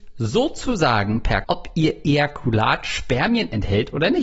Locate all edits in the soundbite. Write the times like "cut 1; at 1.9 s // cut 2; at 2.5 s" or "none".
cut 1; at 1.4 s